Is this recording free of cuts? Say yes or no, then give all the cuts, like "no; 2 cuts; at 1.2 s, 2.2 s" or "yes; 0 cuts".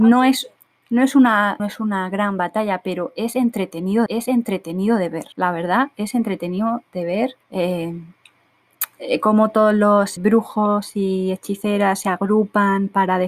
no; 5 cuts; at 1.6 s, 4.1 s, 5.3 s, 7.4 s, 10.2 s